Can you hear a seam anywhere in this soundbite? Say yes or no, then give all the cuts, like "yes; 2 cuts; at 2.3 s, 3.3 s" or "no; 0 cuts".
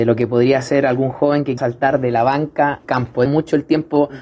yes; 3 cuts; at 1.6 s, 2.8 s, 3.3 s